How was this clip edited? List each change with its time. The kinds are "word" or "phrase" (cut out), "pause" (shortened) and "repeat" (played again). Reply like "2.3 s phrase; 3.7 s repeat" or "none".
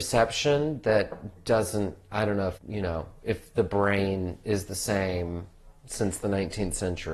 2.6 s word

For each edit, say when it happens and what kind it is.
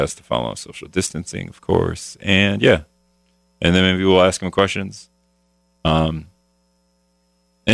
none

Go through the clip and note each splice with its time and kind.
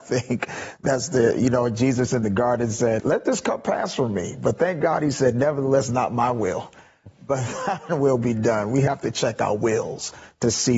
3.0 s word

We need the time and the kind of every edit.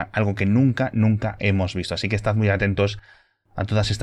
none

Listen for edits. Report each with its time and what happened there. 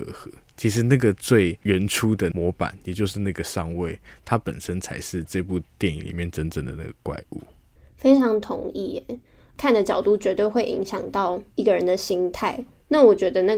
none

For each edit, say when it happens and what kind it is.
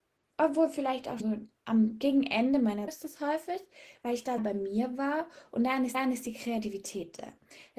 1.2 s word; 1.6 s pause; 2.9 s word; 4.4 s word; 5.9 s repeat

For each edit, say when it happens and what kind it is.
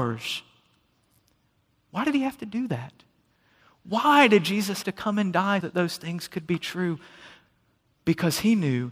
4.8 s word; 5.6 s word

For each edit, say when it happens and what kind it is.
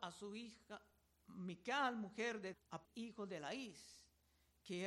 2.5 s word; 2.8 s word

